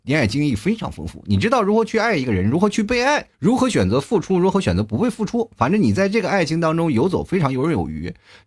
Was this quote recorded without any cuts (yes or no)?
no